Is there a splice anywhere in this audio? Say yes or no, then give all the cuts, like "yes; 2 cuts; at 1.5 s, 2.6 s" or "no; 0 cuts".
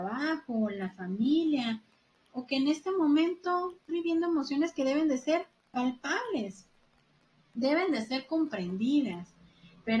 yes; 1 cut; at 3.9 s